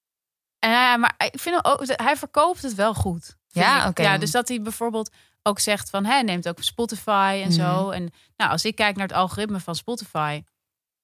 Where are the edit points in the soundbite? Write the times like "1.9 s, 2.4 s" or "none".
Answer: none